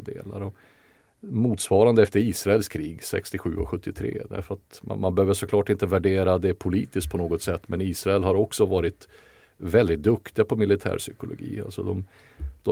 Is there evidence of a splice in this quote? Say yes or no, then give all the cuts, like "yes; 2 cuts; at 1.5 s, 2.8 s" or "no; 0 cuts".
no; 0 cuts